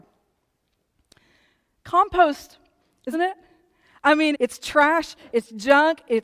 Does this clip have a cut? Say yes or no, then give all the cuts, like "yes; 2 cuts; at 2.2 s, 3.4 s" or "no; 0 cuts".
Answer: yes; 3 cuts; at 3.1 s, 4.3 s, 5.3 s